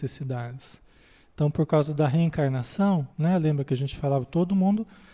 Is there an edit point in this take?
yes; 1 cut; at 3.1 s

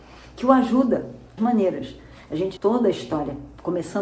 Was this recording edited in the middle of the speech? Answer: yes; 2 cuts; at 1.4 s, 2.6 s

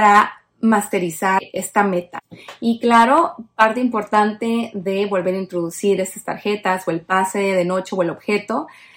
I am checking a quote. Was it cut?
no; 0 cuts

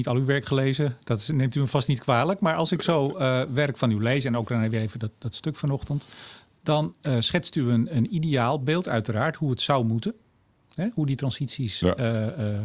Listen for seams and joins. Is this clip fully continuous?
yes; 0 cuts

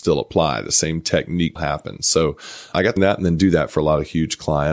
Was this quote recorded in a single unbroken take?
no; 2 cuts; at 1.6 s, 3.0 s

